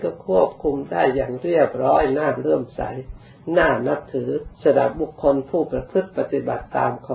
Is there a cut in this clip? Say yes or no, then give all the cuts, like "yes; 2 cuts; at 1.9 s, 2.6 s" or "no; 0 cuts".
yes; 1 cut; at 4.5 s